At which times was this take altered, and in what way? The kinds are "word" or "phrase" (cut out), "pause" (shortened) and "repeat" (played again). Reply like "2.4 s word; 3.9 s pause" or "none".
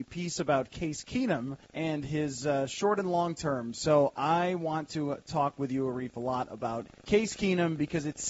1.6 s pause; 7.0 s pause